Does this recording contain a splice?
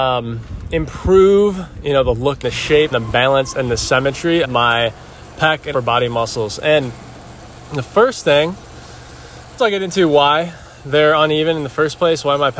yes; 5 cuts; at 2.4 s, 2.9 s, 4.4 s, 5.7 s, 9.6 s

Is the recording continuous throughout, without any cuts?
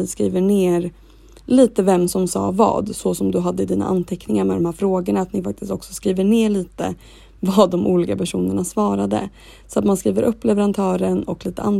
yes; 0 cuts

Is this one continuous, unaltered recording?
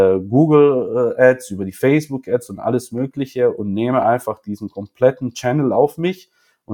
yes; 0 cuts

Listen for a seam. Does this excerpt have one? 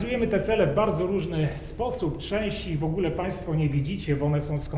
no; 0 cuts

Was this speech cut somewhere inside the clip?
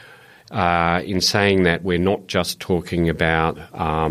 no; 0 cuts

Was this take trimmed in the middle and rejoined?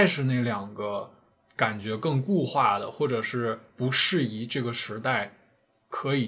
no; 0 cuts

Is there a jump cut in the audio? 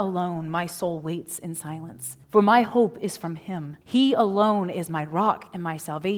yes; 2 cuts; at 2.2 s, 3.8 s

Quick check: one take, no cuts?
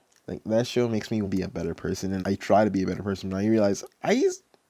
no; 2 cuts; at 1.2 s, 2.2 s

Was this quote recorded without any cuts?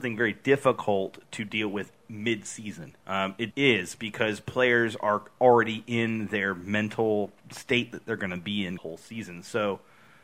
no; 4 cuts; at 3.0 s, 3.5 s, 7.4 s, 8.8 s

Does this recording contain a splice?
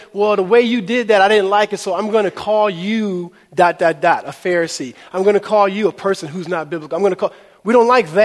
no; 0 cuts

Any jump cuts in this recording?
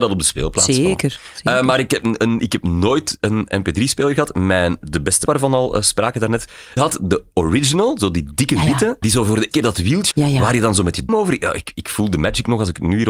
yes; 6 cuts; at 5.3 s, 6.8 s, 9.0 s, 9.5 s, 10.1 s, 11.1 s

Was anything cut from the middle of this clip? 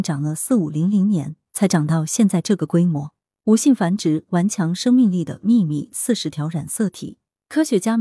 no; 0 cuts

